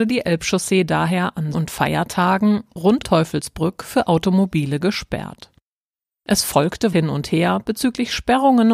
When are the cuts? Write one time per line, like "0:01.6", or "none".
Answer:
0:01.5
0:03.0
0:06.9

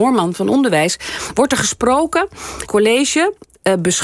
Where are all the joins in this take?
0:02.7

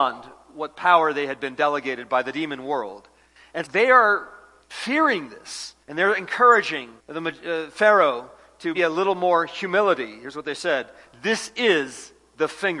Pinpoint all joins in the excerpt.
0:03.6
0:05.8
0:07.0
0:08.7

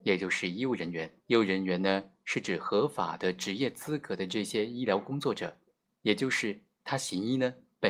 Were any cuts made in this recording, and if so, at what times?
0:01.2
0:05.8

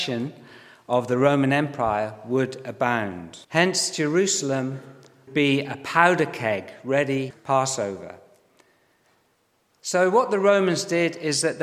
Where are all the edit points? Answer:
0:03.4
0:05.3
0:07.3

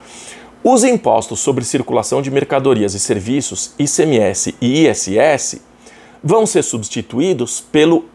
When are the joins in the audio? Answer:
none

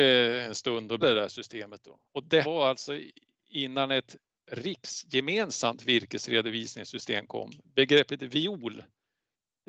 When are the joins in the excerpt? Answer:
0:01.0
0:02.0
0:02.4
0:04.2

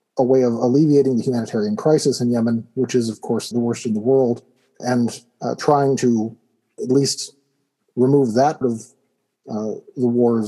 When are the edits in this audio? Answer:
0:03.5
0:04.8
0:06.8
0:08.6

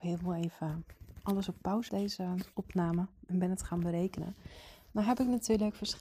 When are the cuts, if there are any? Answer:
0:01.9
0:02.5

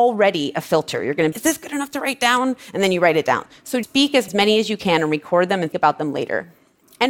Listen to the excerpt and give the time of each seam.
0:01.3
0:03.8
0:04.3
0:05.7

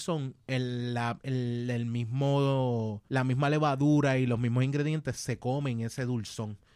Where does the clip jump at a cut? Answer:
0:03.1

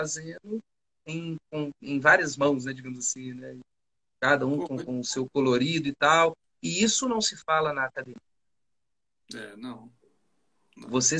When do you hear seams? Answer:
none

